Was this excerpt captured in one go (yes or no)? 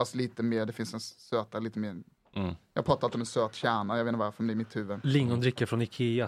yes